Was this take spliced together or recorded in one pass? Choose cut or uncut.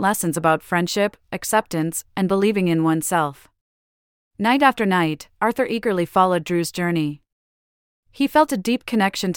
uncut